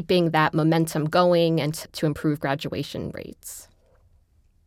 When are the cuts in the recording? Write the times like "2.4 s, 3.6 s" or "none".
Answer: 1.7 s